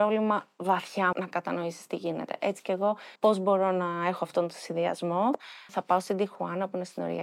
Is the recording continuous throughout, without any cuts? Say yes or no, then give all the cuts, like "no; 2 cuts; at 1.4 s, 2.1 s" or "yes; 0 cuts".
no; 3 cuts; at 1.1 s, 3.2 s, 5.7 s